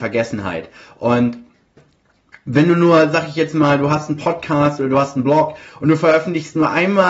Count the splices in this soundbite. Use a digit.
0